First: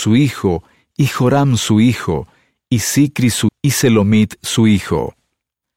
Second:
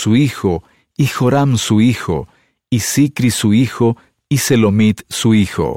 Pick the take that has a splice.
first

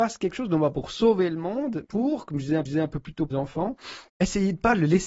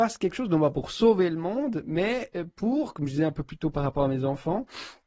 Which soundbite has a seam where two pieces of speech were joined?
first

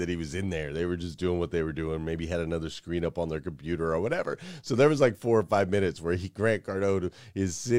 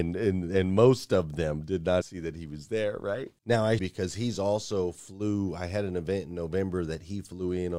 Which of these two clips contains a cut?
second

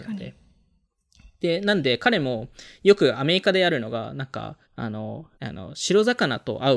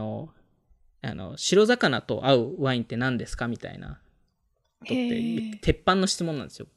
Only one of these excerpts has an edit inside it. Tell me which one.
first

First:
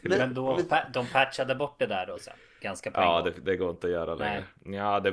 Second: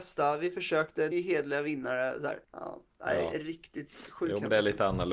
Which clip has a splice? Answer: second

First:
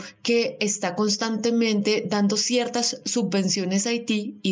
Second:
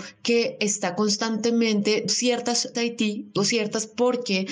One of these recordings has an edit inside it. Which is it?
second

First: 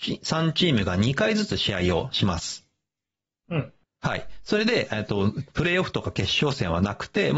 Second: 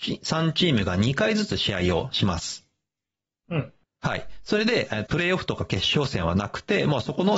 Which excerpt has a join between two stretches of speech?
second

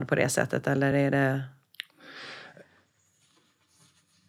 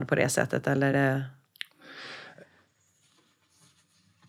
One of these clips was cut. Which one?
second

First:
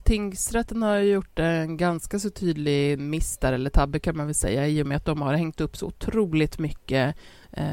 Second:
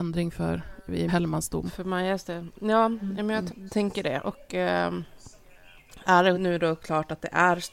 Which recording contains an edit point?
second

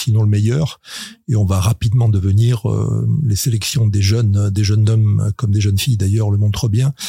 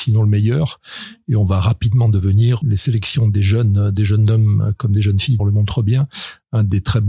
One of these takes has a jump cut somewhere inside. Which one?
second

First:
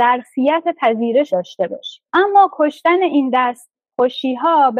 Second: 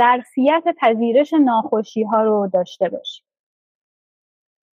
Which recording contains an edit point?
first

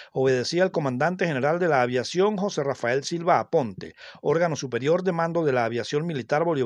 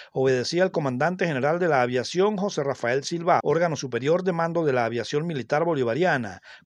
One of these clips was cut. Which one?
second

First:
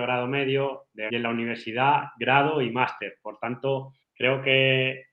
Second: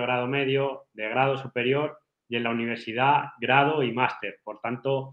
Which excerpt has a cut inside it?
first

